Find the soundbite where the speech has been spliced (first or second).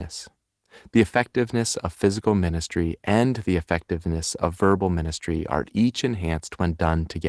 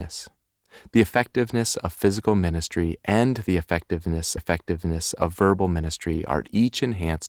second